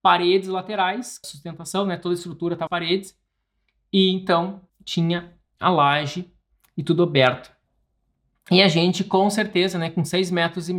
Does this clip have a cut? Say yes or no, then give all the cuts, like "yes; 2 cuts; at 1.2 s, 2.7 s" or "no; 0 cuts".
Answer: yes; 3 cuts; at 1.2 s, 2.7 s, 4.7 s